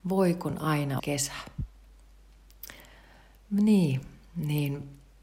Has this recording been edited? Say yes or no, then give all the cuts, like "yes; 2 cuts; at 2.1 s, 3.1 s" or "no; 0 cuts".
yes; 1 cut; at 1.0 s